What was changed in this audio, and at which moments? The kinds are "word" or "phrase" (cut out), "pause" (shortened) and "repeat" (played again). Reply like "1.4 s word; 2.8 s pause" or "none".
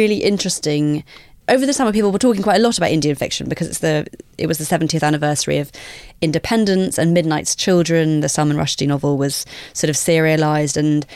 none